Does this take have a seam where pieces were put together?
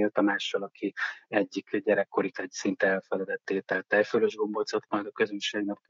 yes; 2 cuts; at 2.3 s, 4.9 s

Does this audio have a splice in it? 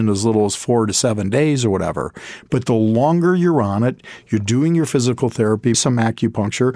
yes; 1 cut; at 5.7 s

